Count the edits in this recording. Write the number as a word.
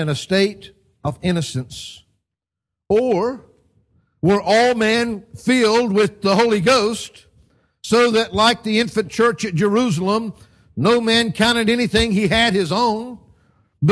zero